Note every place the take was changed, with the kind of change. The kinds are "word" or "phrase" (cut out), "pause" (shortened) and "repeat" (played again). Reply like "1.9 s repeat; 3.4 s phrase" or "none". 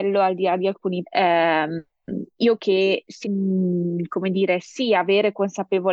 1.0 s word; 2.6 s word; 3.2 s word

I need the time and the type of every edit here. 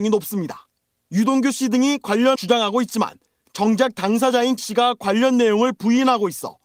2.3 s word; 4.6 s word

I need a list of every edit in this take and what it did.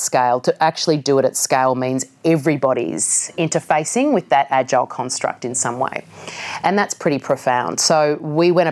none

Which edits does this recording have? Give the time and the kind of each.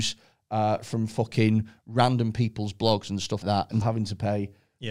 3.4 s word; 3.8 s word

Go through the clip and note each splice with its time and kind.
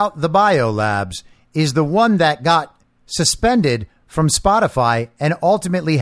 none

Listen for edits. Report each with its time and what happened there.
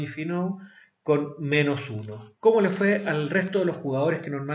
2.4 s pause

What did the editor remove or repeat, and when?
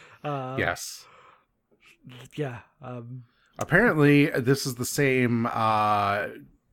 none

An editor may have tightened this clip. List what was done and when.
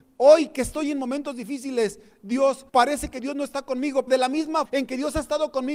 2.7 s pause; 4.1 s word; 4.7 s word

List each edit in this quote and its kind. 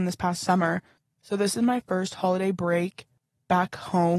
none

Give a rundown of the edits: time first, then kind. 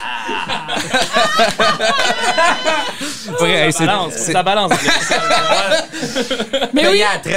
3.4 s word

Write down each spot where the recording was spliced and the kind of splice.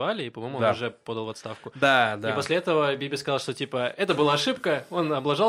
none

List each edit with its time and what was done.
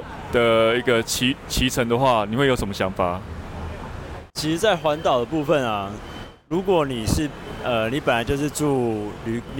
4.3 s pause

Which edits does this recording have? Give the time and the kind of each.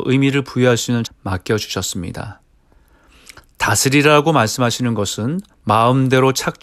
1.0 s word; 5.5 s pause

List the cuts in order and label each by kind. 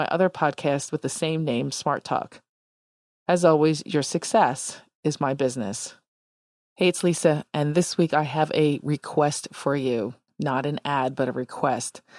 none

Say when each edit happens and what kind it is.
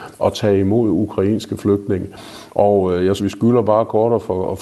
3.2 s word

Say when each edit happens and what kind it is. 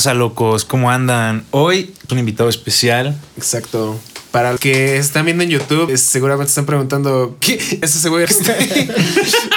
2.1 s word; 4.6 s word; 5.9 s word; 7.8 s word; 8.3 s word

